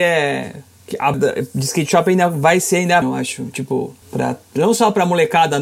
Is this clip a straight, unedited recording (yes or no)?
no